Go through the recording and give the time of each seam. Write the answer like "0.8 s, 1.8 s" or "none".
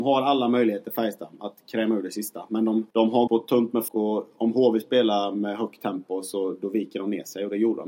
2.9 s, 3.3 s, 3.9 s